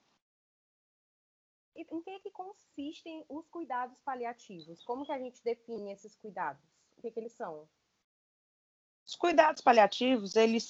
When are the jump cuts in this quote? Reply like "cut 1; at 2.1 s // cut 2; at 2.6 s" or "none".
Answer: cut 1; at 1.9 s

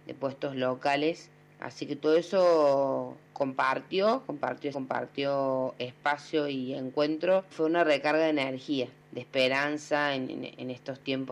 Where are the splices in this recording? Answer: cut 1; at 3.2 s // cut 2; at 4.7 s // cut 3; at 7.5 s

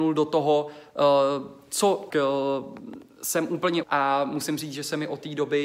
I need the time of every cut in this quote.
cut 1; at 2.1 s // cut 2; at 3.8 s

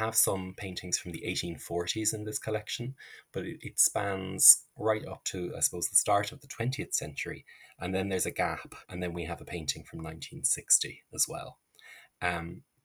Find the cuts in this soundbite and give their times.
cut 1; at 8.8 s

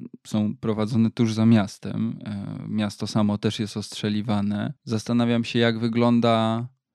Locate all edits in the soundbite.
cut 1; at 4.8 s

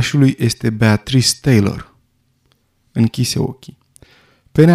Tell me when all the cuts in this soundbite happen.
none

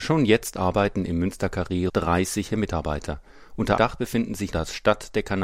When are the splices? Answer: cut 1; at 1.9 s // cut 2; at 2.5 s // cut 3; at 3.8 s // cut 4; at 4.5 s

